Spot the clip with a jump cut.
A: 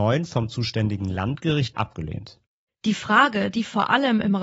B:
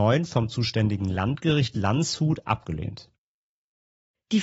A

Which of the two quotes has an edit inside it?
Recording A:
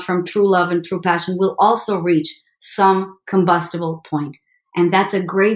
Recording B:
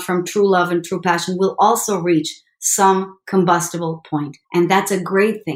B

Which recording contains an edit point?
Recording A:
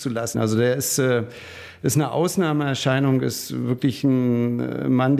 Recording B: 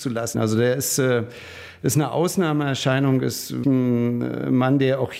B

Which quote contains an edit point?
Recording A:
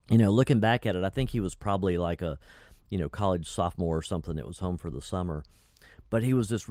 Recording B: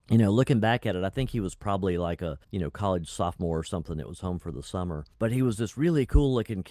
B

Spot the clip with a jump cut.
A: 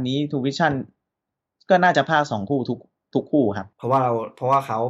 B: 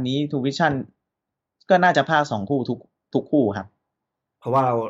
A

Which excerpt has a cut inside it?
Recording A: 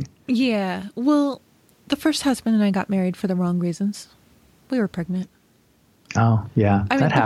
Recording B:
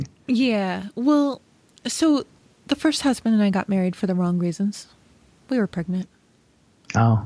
A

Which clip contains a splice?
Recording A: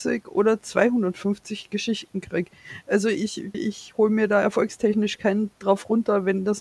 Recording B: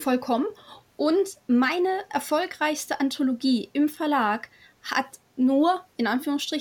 A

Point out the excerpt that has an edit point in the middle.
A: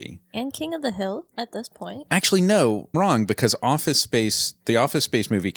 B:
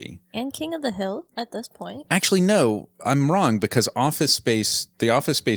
A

